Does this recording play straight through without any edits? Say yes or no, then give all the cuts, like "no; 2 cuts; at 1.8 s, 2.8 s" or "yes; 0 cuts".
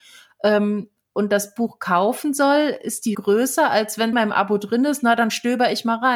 no; 2 cuts; at 3.1 s, 4.1 s